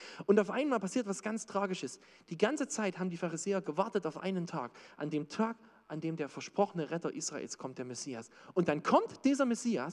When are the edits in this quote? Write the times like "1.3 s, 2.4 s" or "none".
none